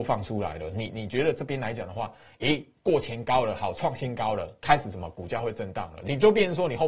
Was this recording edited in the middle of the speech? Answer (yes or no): no